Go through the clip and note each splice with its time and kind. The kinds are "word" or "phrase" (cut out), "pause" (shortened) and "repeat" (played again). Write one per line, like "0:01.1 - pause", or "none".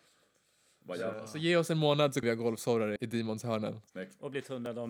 0:02.2 - word
0:03.0 - word
0:03.9 - pause